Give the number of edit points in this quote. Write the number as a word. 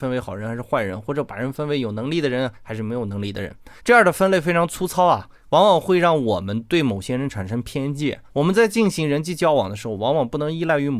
two